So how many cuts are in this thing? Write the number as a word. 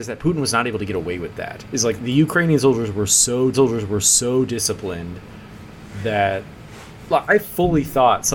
three